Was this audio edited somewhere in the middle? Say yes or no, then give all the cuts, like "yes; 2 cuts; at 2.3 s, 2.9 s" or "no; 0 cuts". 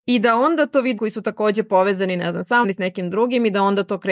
yes; 2 cuts; at 1.0 s, 2.6 s